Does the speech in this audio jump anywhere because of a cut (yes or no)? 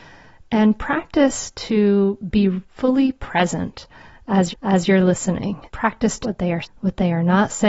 yes